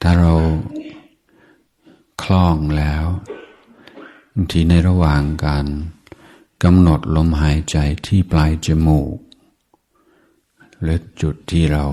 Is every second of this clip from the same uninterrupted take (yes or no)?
yes